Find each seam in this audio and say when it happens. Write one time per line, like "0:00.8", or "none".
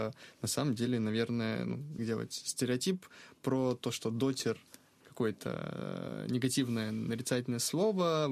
0:02.0
0:05.0